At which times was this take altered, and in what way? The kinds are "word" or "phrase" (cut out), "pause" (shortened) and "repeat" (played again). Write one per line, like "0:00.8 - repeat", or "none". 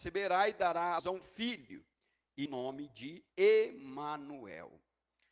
0:01.0 - word
0:02.5 - phrase
0:03.3 - pause

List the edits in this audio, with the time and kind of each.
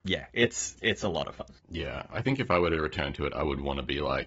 0:01.6 - pause

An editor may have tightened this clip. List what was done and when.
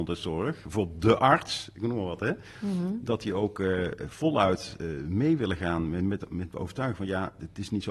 none

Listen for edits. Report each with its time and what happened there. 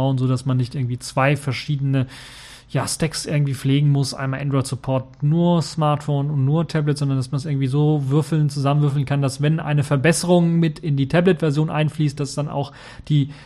none

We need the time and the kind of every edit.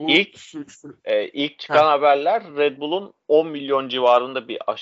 none

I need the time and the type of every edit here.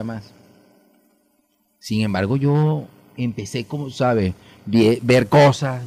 none

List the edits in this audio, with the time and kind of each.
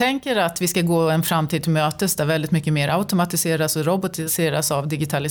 none

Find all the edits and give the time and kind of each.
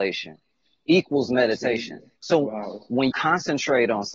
0:02.2 - pause
0:03.1 - word

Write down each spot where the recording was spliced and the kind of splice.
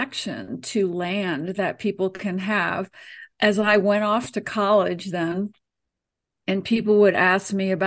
none

